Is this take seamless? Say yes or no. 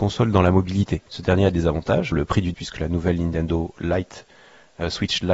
no